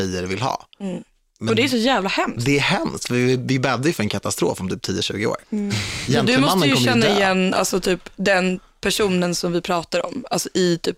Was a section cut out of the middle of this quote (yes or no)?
no